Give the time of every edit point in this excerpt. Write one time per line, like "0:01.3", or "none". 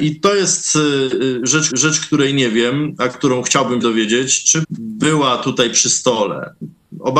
0:01.7
0:03.8
0:04.6